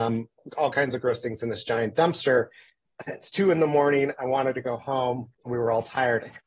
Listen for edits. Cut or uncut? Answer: cut